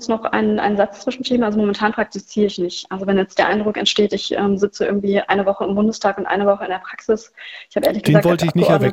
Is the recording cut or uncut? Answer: uncut